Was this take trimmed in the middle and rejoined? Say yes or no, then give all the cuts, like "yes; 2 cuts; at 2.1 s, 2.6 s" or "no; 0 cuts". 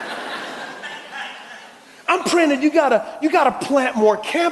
no; 0 cuts